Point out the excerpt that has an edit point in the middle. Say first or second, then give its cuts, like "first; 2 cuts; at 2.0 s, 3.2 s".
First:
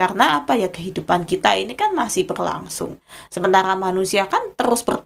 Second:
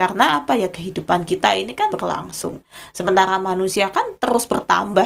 second; 1 cut; at 1.9 s